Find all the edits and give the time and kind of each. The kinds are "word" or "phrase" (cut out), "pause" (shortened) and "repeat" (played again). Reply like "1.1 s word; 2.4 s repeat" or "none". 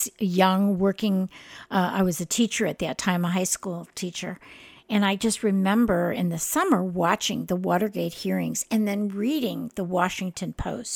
none